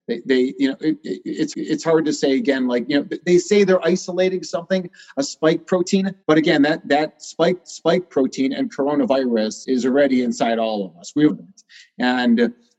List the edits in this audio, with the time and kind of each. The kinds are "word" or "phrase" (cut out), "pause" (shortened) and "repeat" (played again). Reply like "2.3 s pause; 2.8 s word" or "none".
1.5 s repeat; 6.2 s pause; 7.6 s repeat; 9.6 s word; 11.3 s phrase